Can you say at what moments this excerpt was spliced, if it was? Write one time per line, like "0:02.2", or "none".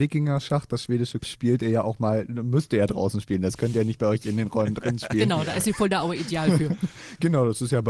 0:01.2